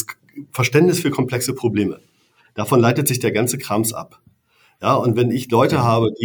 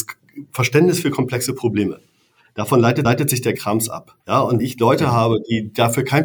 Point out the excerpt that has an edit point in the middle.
second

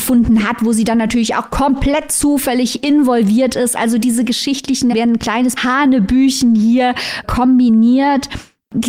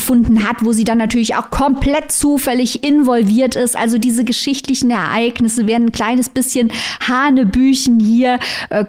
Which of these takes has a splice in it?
first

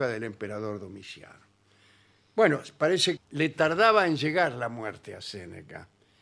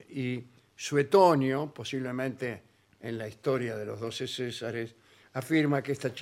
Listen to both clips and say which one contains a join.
first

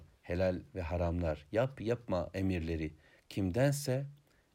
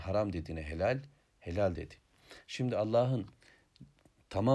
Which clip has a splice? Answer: second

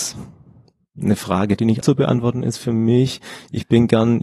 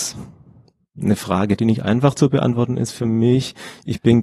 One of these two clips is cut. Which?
first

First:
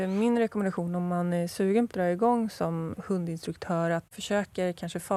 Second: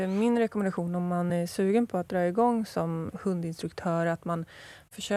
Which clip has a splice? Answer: first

